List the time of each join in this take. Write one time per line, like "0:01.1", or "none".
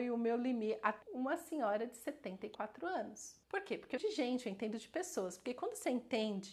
0:01.0
0:03.4
0:04.0